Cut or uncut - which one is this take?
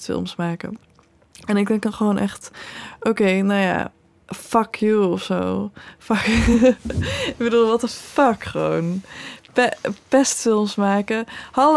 uncut